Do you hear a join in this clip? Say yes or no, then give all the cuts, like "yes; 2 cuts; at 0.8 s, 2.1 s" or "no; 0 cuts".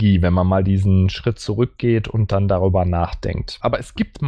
no; 0 cuts